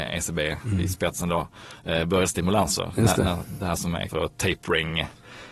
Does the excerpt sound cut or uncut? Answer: cut